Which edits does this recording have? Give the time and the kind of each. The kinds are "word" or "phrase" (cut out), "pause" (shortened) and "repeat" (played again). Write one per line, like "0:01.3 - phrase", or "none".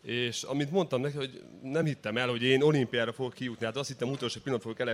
none